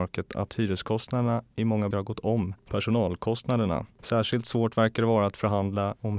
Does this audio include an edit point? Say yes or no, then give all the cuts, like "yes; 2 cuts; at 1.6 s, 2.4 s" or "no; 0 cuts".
yes; 1 cut; at 1.9 s